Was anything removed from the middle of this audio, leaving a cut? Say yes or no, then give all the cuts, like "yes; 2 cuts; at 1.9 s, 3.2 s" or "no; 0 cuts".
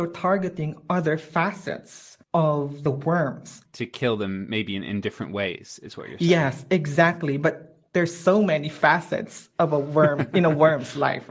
no; 0 cuts